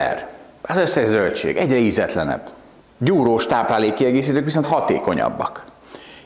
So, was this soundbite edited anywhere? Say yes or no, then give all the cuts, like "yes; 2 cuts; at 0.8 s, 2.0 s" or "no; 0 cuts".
yes; 1 cut; at 4.6 s